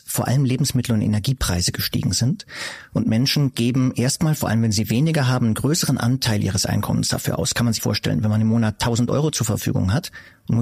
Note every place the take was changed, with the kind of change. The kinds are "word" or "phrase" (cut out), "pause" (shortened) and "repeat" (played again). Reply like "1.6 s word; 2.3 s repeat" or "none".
7.8 s word